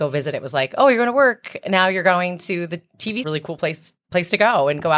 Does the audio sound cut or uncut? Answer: cut